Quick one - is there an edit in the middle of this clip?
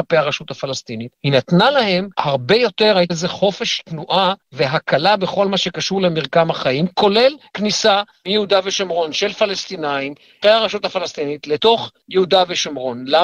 yes; 5 cuts; at 1.2 s, 2.1 s, 3.1 s, 4.4 s, 10.4 s

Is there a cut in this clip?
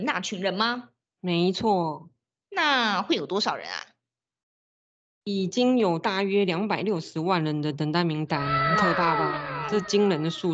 no; 0 cuts

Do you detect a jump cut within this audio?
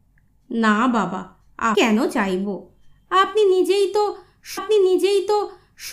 yes; 2 cuts; at 1.7 s, 4.6 s

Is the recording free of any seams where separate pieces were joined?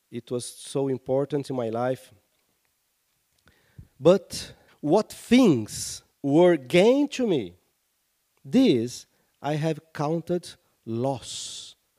no; 1 cut; at 4.7 s

